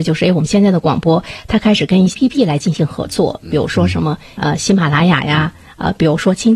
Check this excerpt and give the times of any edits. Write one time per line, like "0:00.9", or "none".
0:02.1